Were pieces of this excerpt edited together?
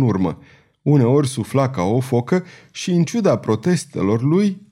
no; 0 cuts

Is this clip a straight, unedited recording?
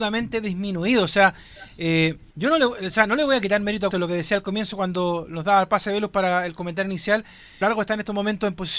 no; 3 cuts; at 2.3 s, 3.9 s, 7.6 s

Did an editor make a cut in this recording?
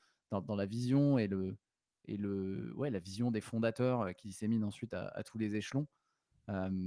yes; 1 cut; at 4.2 s

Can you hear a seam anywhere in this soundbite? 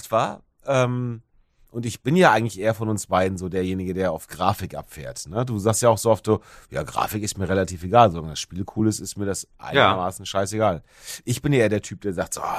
no; 0 cuts

